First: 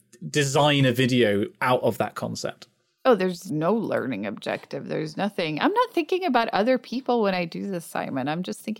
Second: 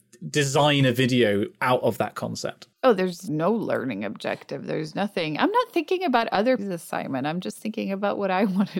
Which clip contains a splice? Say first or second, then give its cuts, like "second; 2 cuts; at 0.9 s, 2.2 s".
second; 2 cuts; at 2.7 s, 6.6 s